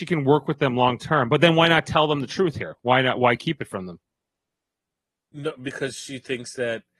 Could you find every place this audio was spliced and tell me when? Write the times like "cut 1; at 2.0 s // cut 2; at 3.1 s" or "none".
none